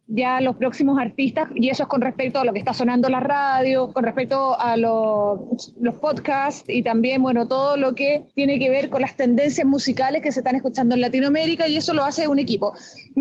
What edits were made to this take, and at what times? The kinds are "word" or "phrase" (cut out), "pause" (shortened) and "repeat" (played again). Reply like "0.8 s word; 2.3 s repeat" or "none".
none